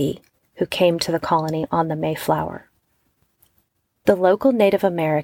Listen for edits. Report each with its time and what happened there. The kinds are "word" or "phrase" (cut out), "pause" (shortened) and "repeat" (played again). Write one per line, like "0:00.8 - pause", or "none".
none